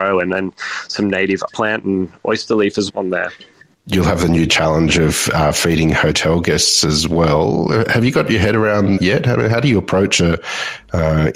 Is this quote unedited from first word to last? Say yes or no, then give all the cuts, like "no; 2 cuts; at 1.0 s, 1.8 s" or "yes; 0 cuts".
no; 3 cuts; at 1.5 s, 2.9 s, 9.0 s